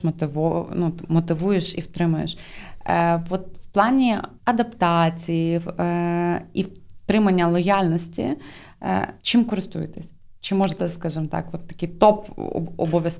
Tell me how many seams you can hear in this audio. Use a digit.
3